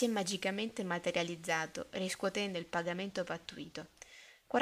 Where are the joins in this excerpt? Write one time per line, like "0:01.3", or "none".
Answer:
none